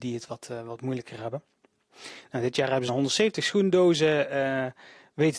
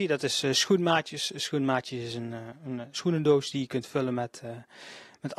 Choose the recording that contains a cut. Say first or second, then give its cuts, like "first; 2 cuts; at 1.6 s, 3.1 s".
first; 1 cut; at 2.9 s